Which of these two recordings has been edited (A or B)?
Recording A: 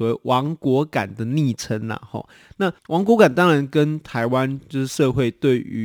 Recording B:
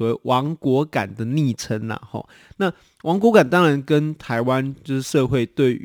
A